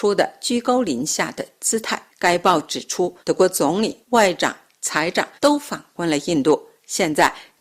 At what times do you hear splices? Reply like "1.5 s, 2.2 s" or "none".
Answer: 2.1 s, 3.2 s, 4.0 s, 5.4 s